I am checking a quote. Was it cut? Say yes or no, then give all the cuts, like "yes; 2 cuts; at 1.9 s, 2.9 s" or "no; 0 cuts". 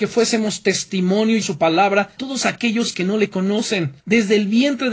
yes; 3 cuts; at 1.4 s, 2.2 s, 4.0 s